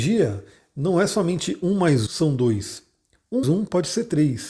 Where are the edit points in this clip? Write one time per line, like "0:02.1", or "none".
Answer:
0:02.1
0:03.4